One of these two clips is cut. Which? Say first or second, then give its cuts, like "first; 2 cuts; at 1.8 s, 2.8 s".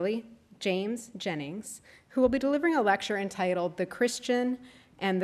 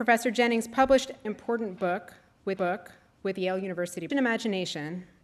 second; 3 cuts; at 1.2 s, 2.6 s, 4.1 s